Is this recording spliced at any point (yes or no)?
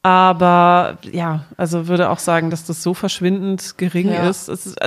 no